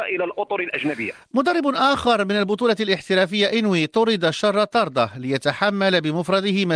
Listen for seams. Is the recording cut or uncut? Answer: uncut